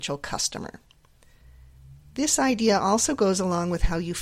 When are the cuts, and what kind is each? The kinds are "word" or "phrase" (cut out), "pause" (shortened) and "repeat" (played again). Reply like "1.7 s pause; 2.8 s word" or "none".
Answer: none